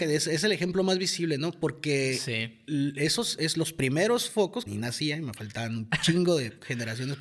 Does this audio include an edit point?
yes; 1 cut; at 4.7 s

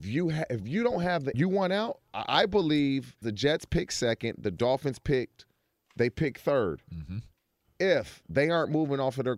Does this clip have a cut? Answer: yes; 2 cuts; at 1.3 s, 3.2 s

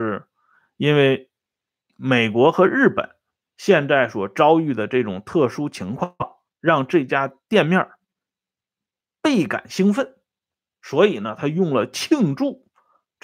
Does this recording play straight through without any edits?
yes; 0 cuts

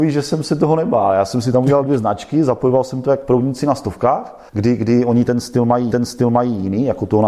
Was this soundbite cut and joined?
yes; 2 cuts; at 4.5 s, 5.9 s

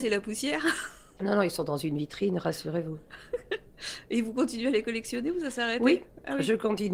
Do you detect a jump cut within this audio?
no; 0 cuts

